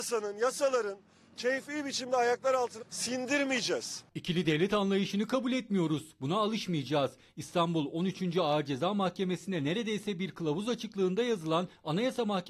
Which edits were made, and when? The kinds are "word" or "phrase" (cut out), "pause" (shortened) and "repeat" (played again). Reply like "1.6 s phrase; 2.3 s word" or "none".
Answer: 2.8 s word